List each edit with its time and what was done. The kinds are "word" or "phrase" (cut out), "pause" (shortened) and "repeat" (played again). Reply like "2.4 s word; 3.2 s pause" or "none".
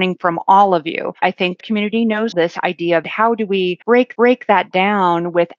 1.2 s pause; 1.6 s word; 2.3 s word; 3.0 s phrase; 4.1 s repeat